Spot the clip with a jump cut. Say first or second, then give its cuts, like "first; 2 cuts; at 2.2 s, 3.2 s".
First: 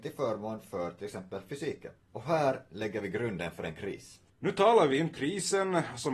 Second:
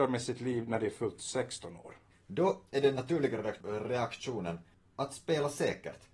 first; 3 cuts; at 2.0 s, 4.3 s, 5.1 s